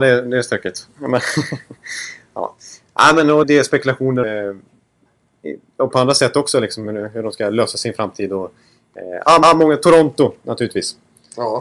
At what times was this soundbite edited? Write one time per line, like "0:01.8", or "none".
0:03.4
0:04.2
0:05.9
0:09.4